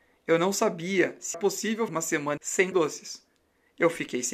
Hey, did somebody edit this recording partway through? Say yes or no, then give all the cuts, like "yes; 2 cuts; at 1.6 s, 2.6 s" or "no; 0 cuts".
yes; 4 cuts; at 1.3 s, 1.9 s, 2.4 s, 2.7 s